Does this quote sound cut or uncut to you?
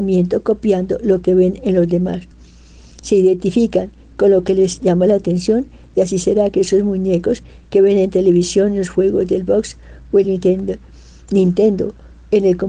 uncut